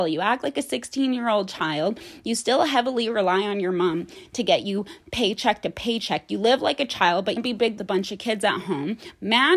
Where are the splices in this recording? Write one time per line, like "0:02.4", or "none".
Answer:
0:07.4
0:07.8